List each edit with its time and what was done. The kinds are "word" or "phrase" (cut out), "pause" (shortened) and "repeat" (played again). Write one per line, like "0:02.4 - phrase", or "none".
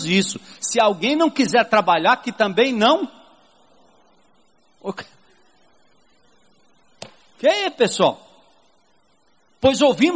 none